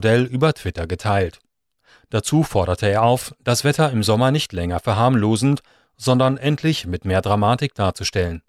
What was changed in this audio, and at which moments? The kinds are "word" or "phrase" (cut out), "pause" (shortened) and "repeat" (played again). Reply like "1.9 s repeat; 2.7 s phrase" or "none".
none